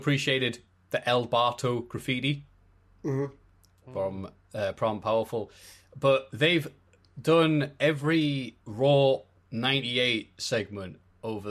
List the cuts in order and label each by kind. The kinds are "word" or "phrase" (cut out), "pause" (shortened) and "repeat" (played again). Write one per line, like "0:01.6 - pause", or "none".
0:08.6 - pause